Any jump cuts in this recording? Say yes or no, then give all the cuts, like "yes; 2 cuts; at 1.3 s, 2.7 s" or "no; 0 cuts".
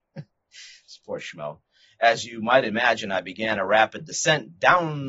no; 0 cuts